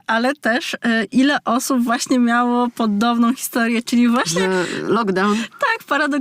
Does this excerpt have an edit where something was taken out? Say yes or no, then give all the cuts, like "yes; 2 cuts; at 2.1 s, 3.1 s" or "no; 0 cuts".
no; 0 cuts